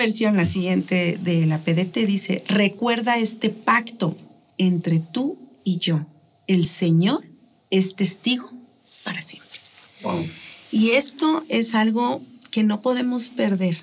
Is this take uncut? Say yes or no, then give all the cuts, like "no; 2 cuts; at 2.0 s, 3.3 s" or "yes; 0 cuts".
yes; 0 cuts